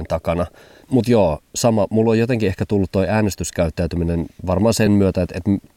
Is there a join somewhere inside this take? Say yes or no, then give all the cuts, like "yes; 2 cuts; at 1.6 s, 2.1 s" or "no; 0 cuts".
no; 0 cuts